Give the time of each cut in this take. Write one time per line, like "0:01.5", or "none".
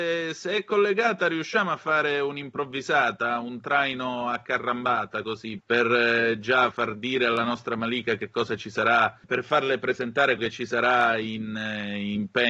0:05.6
0:06.7
0:09.2
0:10.4

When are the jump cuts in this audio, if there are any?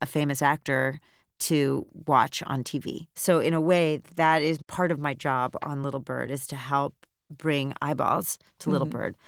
none

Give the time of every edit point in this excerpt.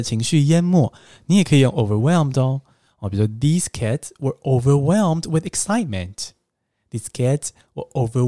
none

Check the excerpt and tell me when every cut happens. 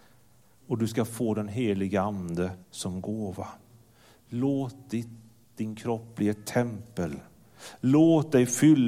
0:02.6

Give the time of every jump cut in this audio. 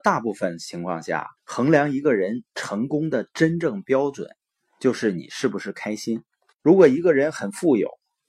0:01.4

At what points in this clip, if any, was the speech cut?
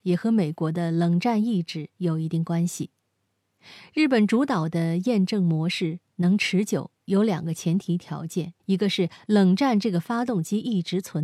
0:08.6

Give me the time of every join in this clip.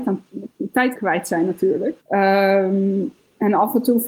0:00.9
0:02.0

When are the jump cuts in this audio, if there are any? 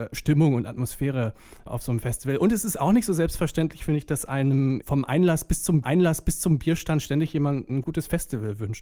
0:04.8
0:05.8

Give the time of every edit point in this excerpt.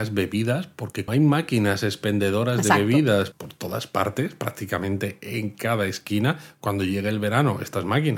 0:01.1
0:03.3

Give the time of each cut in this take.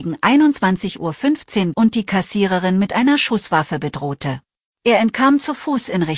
0:01.7
0:04.6

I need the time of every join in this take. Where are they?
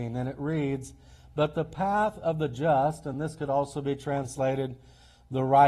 none

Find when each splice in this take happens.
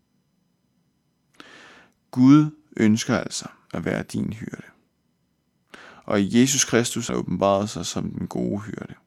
0:07.1

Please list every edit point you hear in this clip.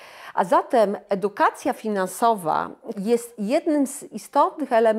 0:02.9

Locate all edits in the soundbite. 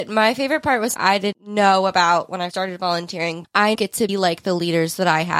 0:00.9
0:01.3
0:02.5
0:03.4
0:03.7
0:04.1

